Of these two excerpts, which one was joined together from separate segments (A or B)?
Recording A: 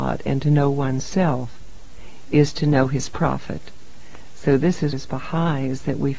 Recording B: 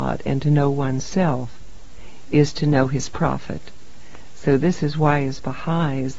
A